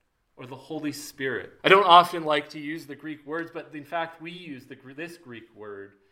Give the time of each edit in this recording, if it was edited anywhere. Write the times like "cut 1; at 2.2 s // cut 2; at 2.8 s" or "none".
cut 1; at 1.6 s